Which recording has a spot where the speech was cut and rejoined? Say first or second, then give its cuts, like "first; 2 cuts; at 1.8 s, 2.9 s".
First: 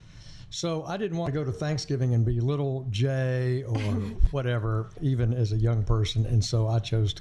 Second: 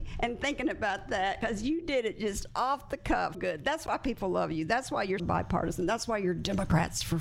second; 2 cuts; at 3.3 s, 5.2 s